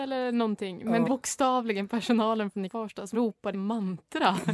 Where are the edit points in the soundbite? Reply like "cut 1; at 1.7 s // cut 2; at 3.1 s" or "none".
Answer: cut 1; at 1.0 s // cut 2; at 2.7 s // cut 3; at 3.1 s // cut 4; at 3.5 s